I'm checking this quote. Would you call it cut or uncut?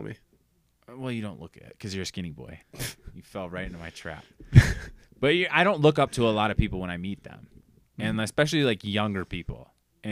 cut